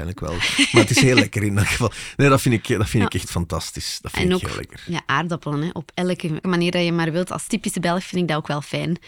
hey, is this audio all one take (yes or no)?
no